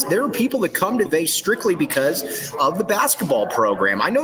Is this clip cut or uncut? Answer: cut